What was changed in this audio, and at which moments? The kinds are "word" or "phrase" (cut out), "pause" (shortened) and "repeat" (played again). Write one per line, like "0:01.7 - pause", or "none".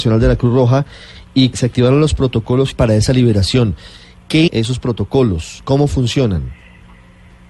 0:01.5 - word
0:02.7 - word
0:04.5 - word